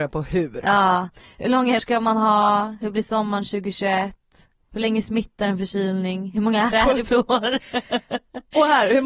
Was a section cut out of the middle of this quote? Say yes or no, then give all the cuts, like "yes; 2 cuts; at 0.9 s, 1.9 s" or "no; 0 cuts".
yes; 3 cuts; at 1.8 s, 6.7 s, 7.1 s